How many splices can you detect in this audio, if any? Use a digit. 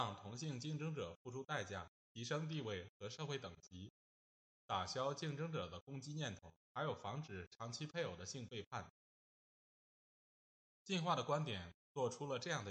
2